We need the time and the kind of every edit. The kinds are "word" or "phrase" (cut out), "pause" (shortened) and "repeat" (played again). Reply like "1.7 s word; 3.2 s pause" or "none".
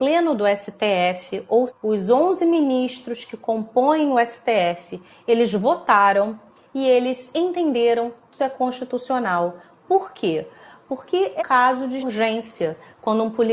1.7 s word; 8.4 s word; 11.4 s word; 12.0 s word